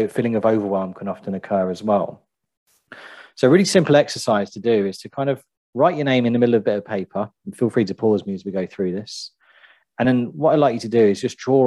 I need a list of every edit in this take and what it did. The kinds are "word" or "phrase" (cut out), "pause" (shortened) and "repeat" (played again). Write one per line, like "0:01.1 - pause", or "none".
none